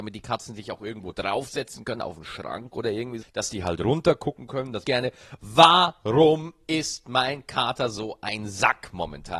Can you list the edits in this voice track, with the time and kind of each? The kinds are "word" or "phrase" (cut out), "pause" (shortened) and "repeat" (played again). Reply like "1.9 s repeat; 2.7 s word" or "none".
3.2 s word; 4.8 s phrase